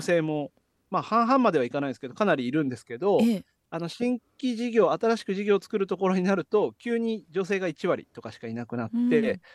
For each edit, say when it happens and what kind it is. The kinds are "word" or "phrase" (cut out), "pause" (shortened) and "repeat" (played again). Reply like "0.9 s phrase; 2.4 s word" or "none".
none